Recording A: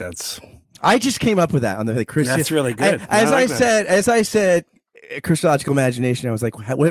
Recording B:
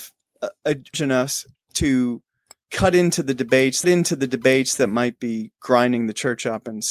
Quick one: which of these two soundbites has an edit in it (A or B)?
B